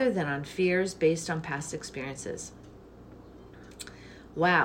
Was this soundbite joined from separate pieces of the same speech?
no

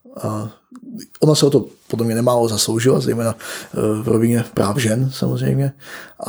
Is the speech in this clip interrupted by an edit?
no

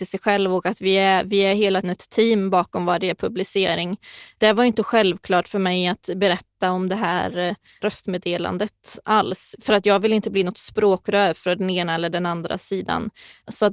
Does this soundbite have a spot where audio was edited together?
yes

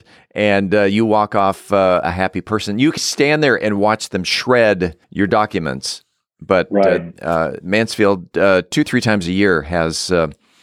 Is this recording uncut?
no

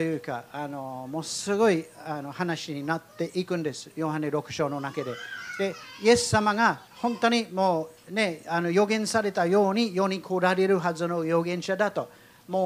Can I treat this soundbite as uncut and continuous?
no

